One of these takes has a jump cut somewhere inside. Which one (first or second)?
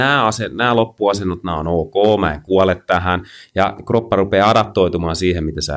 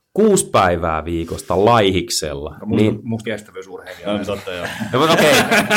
second